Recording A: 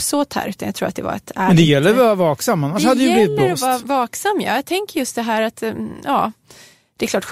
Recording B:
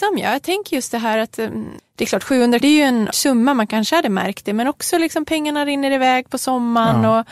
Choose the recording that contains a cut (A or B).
B